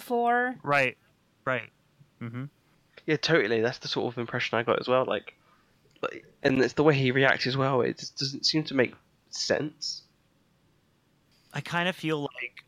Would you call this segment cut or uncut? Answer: uncut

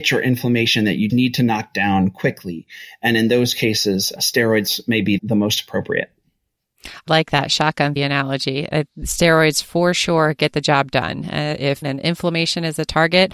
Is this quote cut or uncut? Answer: cut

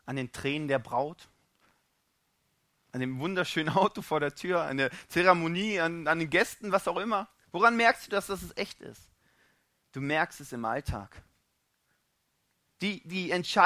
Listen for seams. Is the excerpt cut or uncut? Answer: uncut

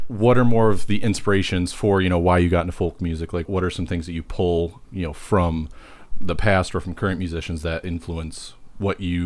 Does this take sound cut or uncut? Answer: cut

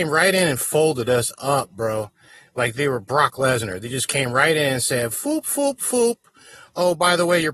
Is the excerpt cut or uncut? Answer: uncut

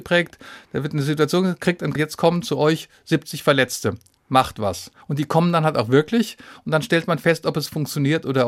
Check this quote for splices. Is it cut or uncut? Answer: cut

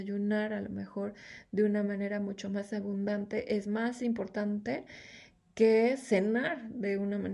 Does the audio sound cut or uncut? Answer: uncut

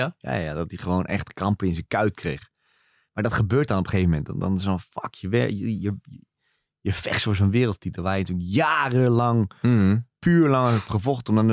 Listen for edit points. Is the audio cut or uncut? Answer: uncut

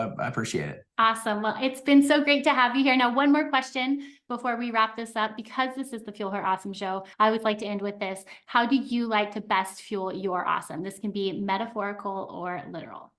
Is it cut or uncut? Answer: cut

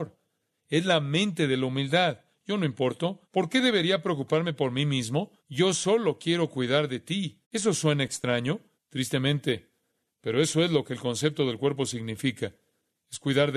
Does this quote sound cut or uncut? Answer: cut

